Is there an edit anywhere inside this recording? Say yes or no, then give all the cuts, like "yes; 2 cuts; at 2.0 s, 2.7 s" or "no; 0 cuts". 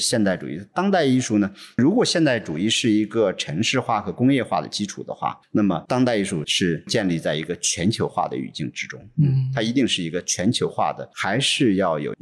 no; 0 cuts